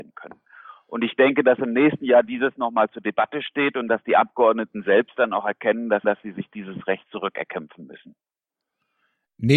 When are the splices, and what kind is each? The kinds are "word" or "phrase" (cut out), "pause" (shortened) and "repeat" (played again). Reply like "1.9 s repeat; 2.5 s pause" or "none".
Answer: 6.0 s repeat